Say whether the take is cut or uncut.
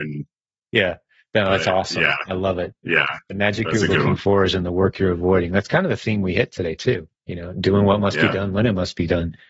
cut